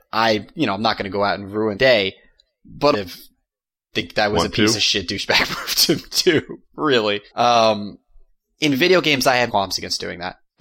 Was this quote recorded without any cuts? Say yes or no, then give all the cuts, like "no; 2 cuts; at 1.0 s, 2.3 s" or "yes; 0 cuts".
no; 4 cuts; at 1.7 s, 2.9 s, 7.3 s, 9.5 s